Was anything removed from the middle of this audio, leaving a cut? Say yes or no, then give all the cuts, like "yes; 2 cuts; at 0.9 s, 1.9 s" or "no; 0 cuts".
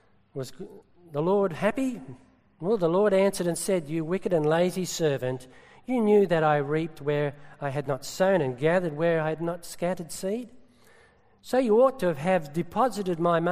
no; 0 cuts